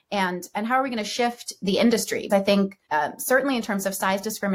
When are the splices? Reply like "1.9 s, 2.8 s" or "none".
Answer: 2.3 s, 2.8 s